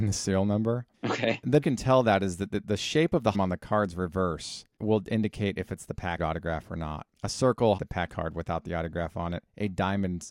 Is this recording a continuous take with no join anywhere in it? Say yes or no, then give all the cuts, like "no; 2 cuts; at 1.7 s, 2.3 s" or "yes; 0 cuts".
no; 9 cuts; at 0.9 s, 1.6 s, 2.6 s, 3.3 s, 4.7 s, 6.2 s, 7.1 s, 7.8 s, 8.1 s